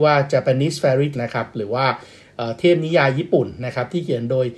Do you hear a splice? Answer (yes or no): yes